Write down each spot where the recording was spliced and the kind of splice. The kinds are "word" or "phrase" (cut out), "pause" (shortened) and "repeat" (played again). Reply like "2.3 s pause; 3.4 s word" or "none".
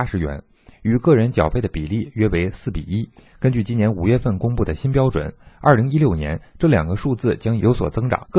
none